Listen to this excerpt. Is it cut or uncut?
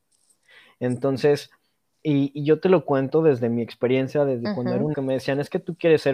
cut